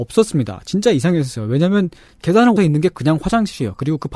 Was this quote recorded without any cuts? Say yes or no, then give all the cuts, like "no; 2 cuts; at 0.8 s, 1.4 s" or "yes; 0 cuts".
no; 1 cut; at 2.6 s